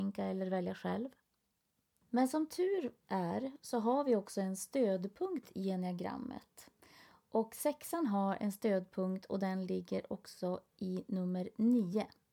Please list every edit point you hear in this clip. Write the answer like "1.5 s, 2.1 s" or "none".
none